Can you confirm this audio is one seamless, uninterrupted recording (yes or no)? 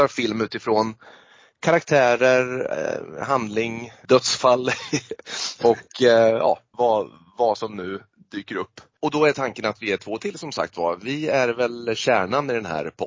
no